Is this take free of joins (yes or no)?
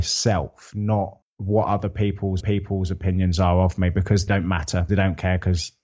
no